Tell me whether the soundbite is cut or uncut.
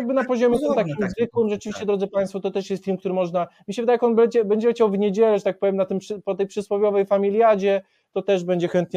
uncut